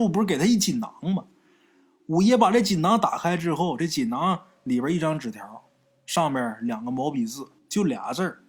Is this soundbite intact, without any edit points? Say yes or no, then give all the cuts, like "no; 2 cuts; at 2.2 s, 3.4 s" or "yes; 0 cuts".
yes; 0 cuts